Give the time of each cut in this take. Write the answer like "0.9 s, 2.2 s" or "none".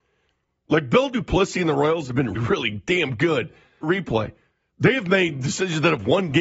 2.4 s, 3.8 s